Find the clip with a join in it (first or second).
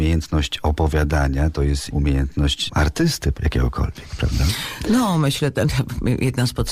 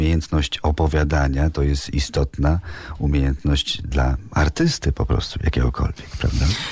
first